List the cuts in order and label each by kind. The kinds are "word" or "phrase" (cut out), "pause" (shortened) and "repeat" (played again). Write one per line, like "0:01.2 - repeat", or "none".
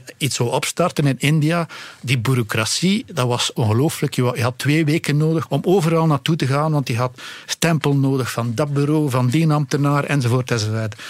0:05.5 - word